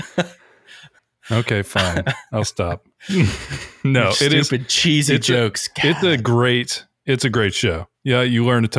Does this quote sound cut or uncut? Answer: cut